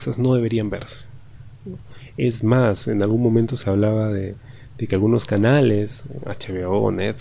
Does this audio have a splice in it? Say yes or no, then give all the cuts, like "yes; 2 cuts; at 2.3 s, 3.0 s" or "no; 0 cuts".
no; 0 cuts